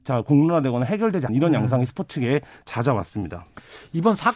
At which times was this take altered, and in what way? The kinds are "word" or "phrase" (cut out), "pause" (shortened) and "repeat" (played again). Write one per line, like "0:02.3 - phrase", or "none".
0:01.3 - word

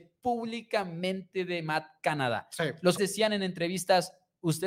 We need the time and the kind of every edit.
0:03.0 - word

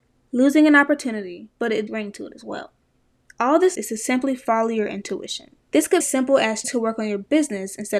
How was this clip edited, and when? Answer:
0:01.5 - pause
0:01.9 - phrase
0:03.0 - pause
0:03.7 - word
0:05.6 - pause
0:06.0 - phrase
0:06.6 - word

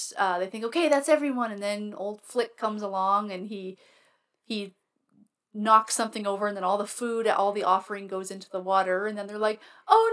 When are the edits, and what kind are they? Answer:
none

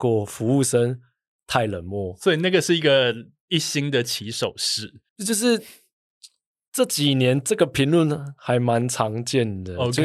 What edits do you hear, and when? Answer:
0:05.1 - pause

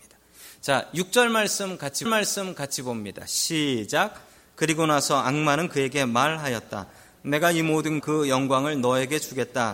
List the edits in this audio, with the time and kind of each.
0:02.1 - repeat
0:08.0 - word

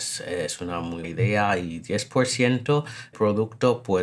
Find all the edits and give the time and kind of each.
0:01.0 - word
0:03.1 - phrase

